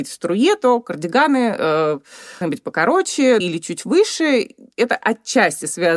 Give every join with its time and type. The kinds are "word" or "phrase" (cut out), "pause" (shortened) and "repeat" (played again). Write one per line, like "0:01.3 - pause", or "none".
0:02.4 - word
0:03.4 - phrase